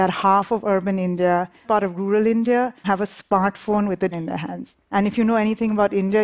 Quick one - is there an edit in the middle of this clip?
yes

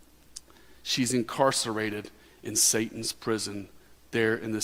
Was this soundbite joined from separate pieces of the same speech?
no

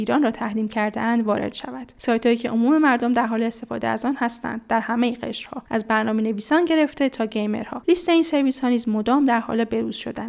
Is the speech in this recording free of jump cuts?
yes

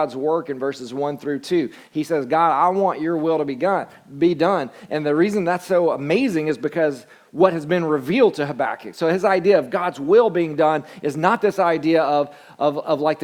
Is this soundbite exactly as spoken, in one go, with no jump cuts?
yes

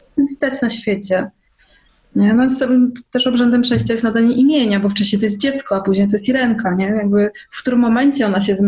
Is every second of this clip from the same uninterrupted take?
yes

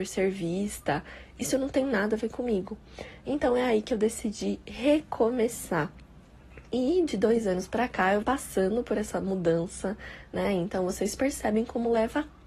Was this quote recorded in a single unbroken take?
no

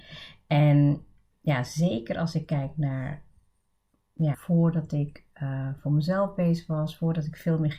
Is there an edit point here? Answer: yes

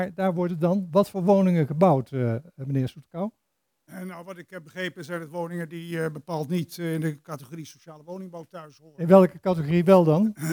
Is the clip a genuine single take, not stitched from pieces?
yes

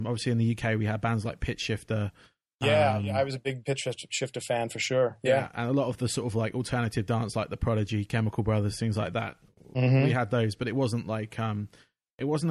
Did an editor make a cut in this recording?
no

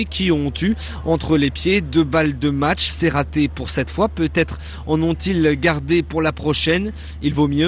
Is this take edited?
no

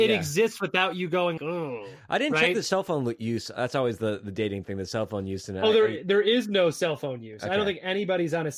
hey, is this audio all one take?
no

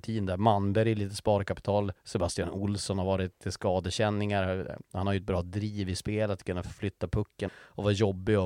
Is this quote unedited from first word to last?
no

